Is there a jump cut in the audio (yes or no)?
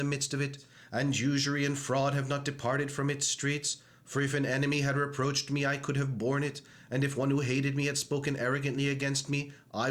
no